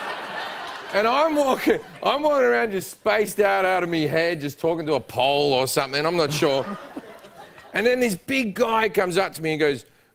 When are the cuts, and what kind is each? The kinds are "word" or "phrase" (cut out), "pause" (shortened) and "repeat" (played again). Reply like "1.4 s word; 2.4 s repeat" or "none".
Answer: none